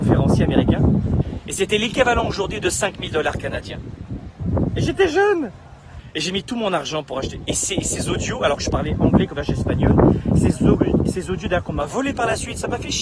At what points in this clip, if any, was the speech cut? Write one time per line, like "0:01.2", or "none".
0:09.3